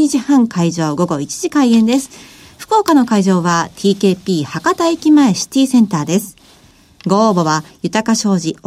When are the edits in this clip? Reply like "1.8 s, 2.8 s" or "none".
none